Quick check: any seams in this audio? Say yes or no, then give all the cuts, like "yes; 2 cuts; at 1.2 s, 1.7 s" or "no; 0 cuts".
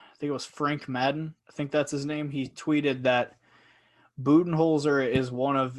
no; 0 cuts